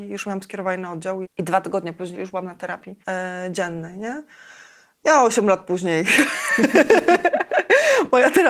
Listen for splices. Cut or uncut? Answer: cut